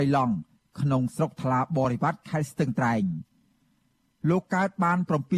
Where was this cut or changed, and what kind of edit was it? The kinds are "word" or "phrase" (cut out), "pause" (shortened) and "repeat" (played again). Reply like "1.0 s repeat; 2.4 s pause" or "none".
none